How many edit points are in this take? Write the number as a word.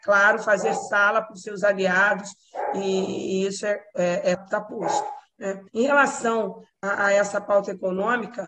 two